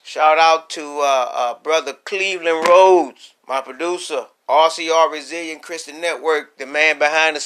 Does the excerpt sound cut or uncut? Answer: cut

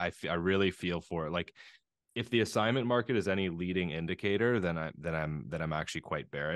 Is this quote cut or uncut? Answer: uncut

